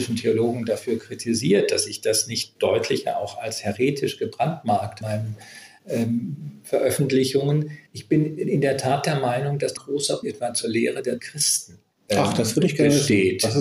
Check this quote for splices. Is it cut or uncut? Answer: cut